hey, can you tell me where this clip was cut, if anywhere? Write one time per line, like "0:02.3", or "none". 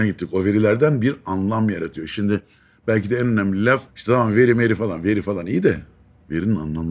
none